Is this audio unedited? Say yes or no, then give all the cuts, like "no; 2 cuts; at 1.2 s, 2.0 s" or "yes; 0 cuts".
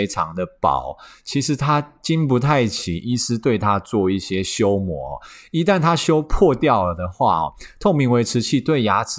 yes; 0 cuts